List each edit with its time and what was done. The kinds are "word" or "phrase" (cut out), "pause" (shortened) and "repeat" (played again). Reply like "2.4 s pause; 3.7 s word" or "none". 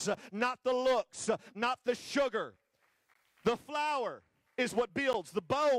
none

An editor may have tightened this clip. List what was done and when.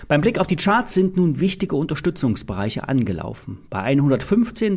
none

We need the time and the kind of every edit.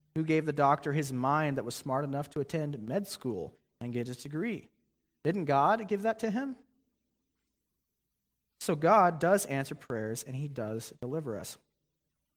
none

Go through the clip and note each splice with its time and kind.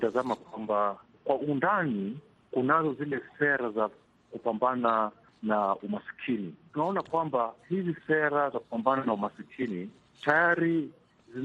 none

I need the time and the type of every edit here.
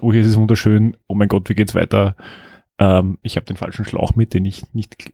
none

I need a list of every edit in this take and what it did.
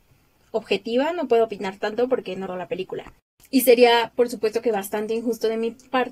2.5 s word

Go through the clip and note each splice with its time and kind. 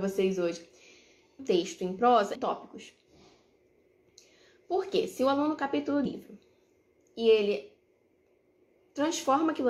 1.4 s phrase; 2.4 s word; 5.6 s phrase; 6.1 s word

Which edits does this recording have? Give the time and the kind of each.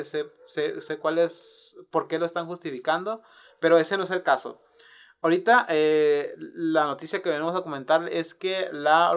none

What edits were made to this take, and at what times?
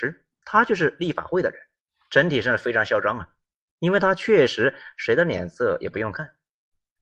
none

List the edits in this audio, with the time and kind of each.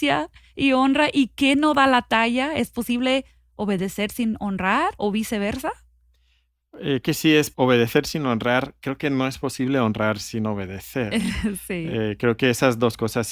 5.0 s word; 7.0 s word; 7.5 s word

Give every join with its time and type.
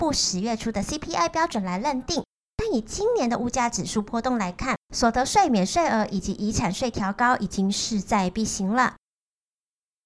4.8 s pause

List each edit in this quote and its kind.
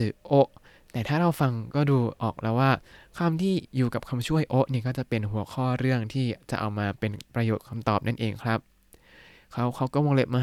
none

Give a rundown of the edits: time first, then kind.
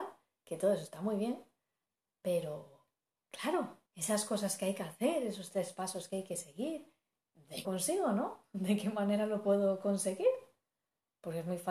3.9 s pause; 7.6 s phrase

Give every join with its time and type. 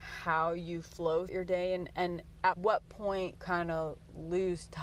1.3 s word; 2.5 s word; 3.4 s word

